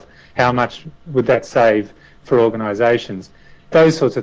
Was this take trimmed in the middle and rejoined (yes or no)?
no